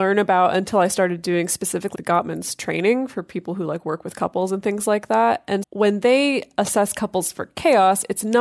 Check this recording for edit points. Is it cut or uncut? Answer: cut